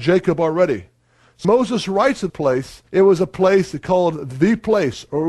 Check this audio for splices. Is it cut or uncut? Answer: cut